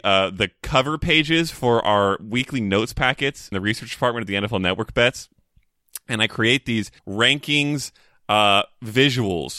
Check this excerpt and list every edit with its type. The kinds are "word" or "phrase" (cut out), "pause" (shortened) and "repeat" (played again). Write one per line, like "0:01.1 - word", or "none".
0:03.5 - word
0:07.0 - pause